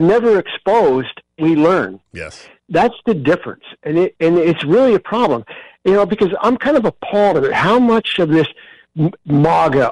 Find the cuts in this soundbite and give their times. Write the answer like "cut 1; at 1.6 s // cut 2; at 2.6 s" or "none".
cut 1; at 1.4 s // cut 2; at 6.4 s